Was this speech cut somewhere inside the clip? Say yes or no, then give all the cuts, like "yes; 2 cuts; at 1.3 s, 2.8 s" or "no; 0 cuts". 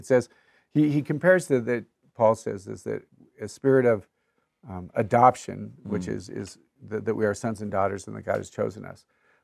no; 0 cuts